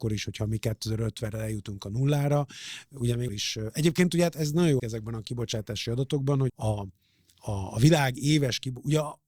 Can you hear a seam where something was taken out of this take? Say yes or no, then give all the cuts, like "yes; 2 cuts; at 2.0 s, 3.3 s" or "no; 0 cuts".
yes; 3 cuts; at 3.3 s, 4.8 s, 6.5 s